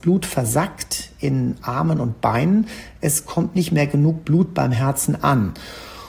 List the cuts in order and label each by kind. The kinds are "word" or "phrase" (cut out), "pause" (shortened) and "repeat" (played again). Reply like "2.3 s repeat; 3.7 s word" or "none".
none